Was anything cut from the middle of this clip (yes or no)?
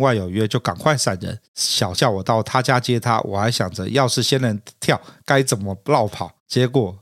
yes